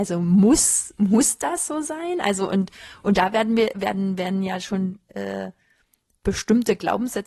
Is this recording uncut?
yes; 0 cuts

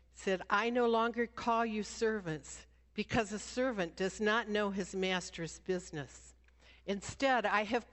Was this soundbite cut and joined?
no; 0 cuts

